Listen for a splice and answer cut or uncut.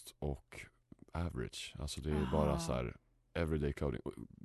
uncut